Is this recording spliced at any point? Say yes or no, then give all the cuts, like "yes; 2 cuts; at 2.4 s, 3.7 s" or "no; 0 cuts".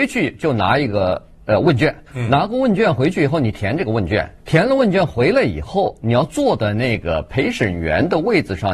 yes; 2 cuts; at 2.1 s, 4.4 s